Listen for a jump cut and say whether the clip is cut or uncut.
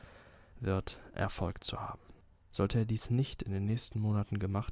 uncut